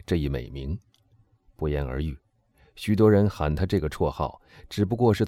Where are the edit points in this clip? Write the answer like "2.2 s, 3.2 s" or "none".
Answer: none